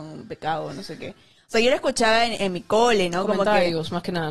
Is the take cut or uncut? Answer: cut